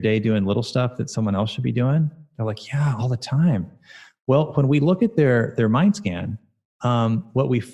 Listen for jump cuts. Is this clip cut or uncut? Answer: uncut